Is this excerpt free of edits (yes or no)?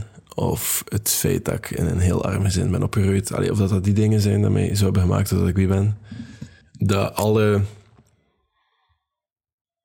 yes